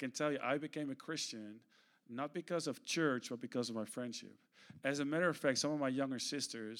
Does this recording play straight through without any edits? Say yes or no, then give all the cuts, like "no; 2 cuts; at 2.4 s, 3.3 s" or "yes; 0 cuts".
yes; 0 cuts